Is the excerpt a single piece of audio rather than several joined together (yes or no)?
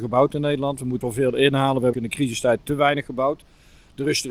no